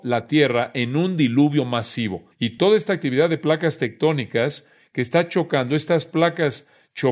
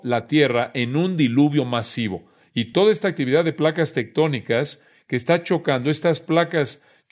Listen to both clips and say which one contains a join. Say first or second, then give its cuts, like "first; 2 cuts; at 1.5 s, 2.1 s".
first; 1 cut; at 2.3 s